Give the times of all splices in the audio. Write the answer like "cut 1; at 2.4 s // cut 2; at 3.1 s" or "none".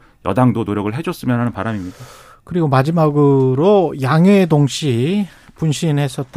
none